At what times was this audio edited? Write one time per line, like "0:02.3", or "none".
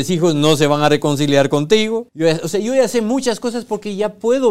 0:02.1

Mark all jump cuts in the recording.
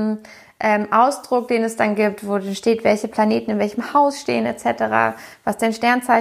none

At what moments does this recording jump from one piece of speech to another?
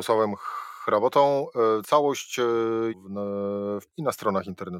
0:02.9
0:03.9

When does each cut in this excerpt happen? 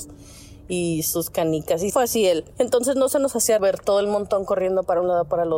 0:01.9
0:03.6

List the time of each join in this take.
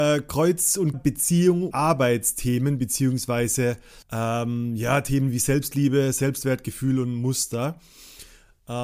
0:00.9
0:01.7
0:04.0

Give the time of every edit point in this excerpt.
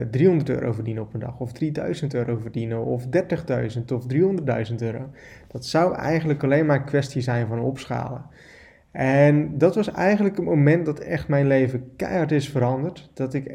none

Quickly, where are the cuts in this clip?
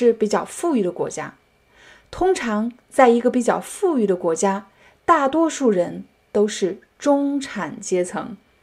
none

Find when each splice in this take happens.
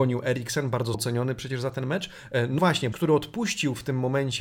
0:00.9
0:02.6
0:02.9

